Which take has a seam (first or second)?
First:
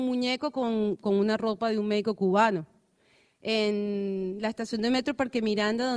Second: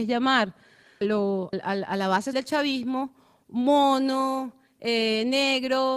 second